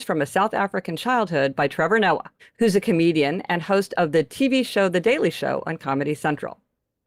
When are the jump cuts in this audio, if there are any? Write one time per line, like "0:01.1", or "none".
0:02.4